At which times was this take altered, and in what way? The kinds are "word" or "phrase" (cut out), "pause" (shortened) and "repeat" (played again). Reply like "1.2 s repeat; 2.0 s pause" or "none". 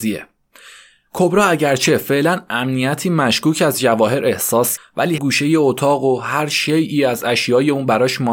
4.8 s word; 5.2 s word